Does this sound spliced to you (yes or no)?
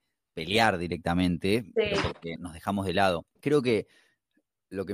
yes